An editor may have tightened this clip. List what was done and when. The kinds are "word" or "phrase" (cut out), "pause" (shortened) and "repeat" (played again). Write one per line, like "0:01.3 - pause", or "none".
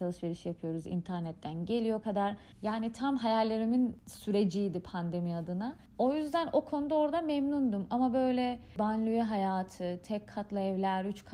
0:02.0 - phrase